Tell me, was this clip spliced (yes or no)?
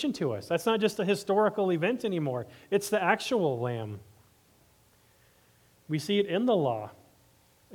no